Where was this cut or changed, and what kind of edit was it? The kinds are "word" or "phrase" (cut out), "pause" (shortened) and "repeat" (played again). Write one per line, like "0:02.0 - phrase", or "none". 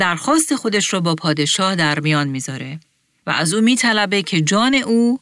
none